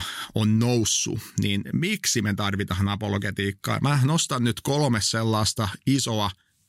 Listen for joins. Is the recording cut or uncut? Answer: uncut